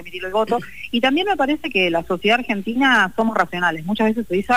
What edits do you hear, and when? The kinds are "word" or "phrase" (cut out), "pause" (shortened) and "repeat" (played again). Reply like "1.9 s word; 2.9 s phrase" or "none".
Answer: none